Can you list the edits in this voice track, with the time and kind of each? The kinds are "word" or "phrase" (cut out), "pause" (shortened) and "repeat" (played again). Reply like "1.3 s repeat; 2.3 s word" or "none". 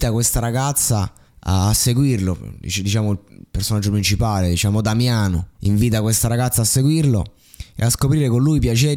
1.2 s pause; 5.5 s pause